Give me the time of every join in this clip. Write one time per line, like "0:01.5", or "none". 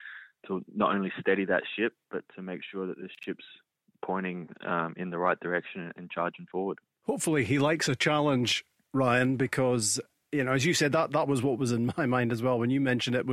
none